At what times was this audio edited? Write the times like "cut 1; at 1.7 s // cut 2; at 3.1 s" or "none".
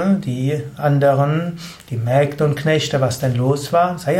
none